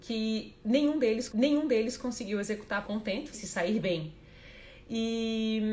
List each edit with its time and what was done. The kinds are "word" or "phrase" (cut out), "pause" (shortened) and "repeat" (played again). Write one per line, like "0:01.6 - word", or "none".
0:01.3 - repeat
0:02.8 - word
0:03.3 - word